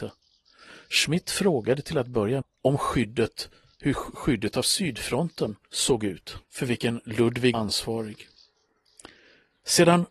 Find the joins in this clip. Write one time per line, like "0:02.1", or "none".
0:02.4
0:05.6
0:06.4
0:07.5